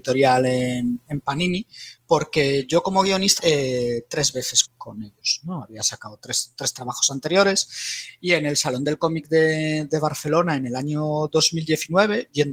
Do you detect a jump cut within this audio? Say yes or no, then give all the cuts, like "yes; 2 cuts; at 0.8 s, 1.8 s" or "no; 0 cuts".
yes; 3 cuts; at 2.0 s, 3.4 s, 4.6 s